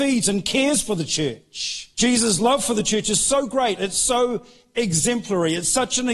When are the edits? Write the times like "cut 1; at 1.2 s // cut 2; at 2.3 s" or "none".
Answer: cut 1; at 1.9 s